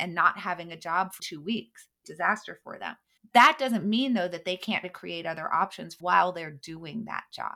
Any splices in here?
yes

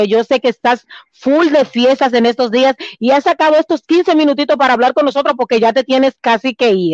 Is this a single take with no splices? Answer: yes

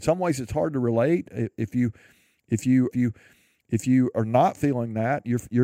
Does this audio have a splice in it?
yes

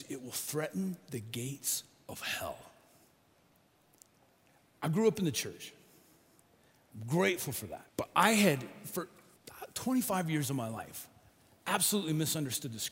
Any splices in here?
yes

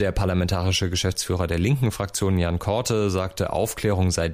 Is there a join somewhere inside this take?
no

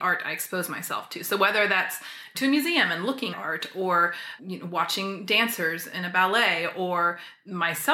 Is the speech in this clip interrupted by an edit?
yes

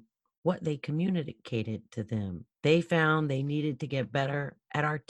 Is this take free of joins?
no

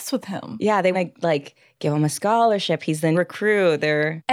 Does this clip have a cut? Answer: yes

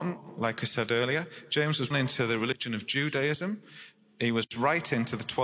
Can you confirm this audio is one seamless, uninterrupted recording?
no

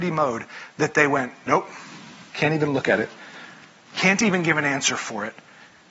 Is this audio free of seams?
yes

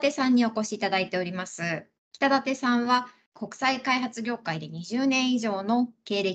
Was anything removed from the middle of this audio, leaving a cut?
yes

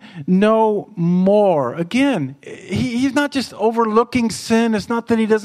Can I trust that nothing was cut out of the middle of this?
yes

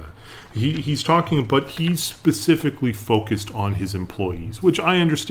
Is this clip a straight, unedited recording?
yes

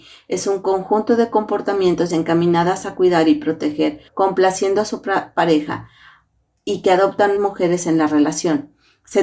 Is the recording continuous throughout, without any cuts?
no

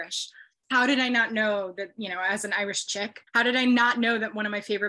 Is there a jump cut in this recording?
yes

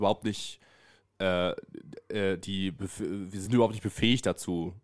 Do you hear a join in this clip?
no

